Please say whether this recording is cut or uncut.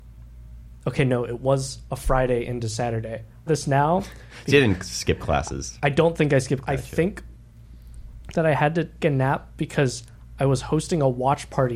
cut